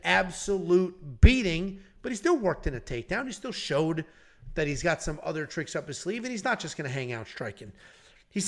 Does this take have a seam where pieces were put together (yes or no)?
no